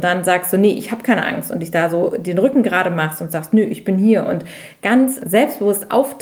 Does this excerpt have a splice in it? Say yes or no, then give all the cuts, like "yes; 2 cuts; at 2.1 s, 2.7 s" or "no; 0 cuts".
no; 0 cuts